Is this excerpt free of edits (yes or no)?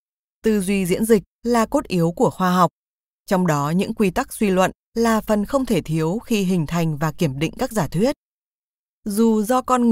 yes